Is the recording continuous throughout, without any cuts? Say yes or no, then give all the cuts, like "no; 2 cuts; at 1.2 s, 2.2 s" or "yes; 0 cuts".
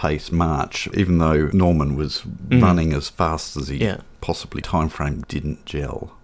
no; 3 cuts; at 0.9 s, 4.6 s, 5.2 s